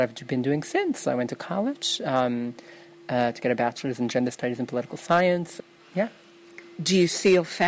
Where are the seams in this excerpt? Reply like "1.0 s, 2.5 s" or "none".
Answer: none